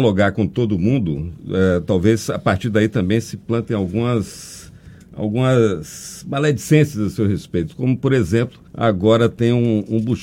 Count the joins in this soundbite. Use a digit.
1